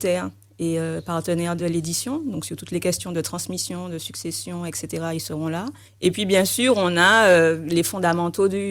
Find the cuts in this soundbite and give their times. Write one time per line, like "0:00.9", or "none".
0:01.6
0:05.9